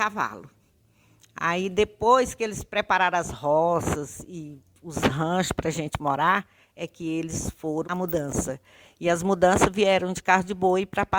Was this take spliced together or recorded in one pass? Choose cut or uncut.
cut